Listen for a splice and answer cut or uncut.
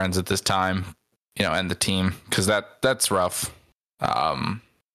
uncut